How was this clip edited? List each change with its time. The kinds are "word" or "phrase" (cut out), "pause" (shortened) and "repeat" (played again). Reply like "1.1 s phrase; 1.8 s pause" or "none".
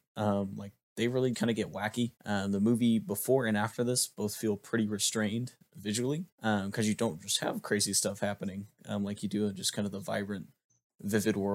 1.3 s word; 2.2 s pause; 6.3 s pause